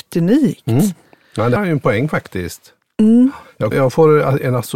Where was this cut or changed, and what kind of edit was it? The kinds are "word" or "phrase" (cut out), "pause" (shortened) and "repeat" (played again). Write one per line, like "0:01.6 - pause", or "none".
0:01.6 - word
0:03.7 - word